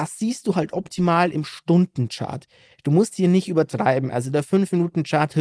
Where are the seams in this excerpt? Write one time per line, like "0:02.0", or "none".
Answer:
0:03.1